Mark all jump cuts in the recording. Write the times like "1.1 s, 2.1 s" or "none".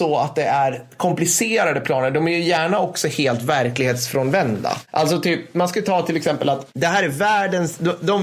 none